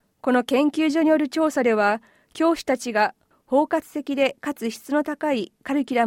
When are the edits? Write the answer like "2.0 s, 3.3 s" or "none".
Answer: none

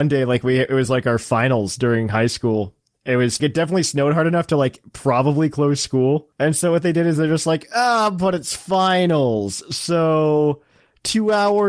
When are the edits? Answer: 3.4 s, 6.3 s

